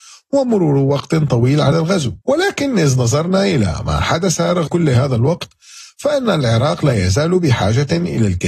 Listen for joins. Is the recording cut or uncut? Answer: cut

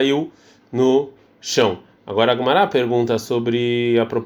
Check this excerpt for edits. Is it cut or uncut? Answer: uncut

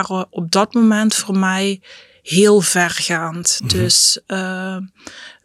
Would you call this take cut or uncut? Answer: uncut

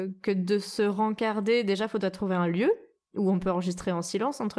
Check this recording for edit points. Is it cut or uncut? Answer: uncut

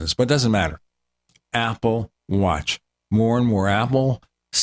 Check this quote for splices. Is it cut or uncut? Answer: cut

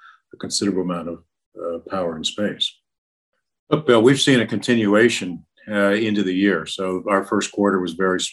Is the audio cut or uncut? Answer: uncut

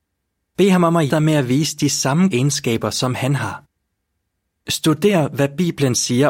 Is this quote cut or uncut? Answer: cut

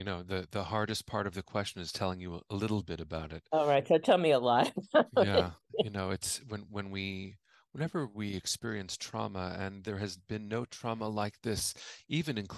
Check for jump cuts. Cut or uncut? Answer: uncut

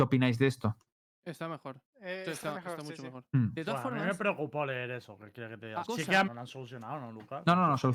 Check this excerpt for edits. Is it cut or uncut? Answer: cut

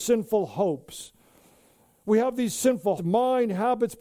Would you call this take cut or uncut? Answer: cut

